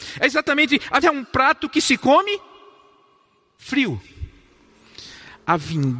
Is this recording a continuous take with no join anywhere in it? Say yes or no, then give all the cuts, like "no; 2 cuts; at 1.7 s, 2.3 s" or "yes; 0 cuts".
no; 1 cut; at 1.0 s